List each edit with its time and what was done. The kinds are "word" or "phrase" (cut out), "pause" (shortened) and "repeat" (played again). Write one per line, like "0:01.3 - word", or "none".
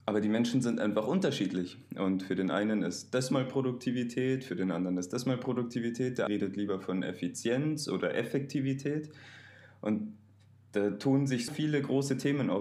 0:06.3 - word
0:11.5 - word